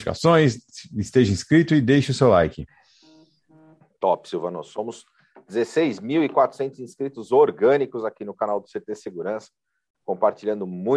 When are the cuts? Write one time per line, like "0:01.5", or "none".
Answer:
none